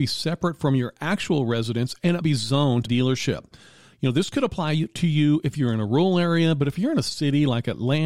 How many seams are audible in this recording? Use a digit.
2